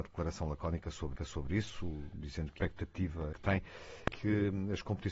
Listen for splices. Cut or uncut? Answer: cut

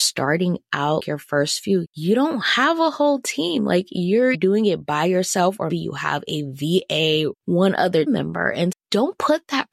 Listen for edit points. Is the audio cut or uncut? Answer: cut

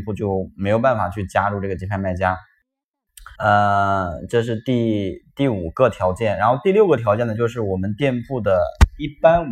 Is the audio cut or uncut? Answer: cut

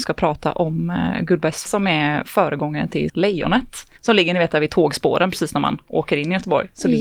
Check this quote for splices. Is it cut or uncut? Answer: cut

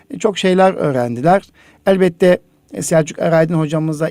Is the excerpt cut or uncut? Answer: uncut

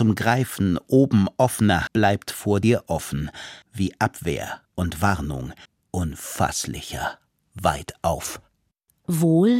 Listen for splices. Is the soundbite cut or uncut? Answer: cut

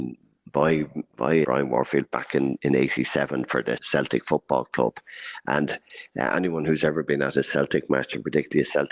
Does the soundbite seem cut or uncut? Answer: cut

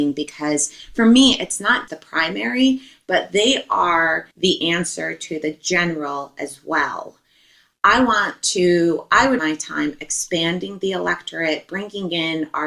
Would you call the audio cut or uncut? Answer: cut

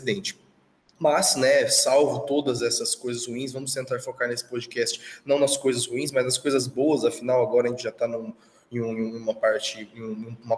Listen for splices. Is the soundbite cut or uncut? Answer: uncut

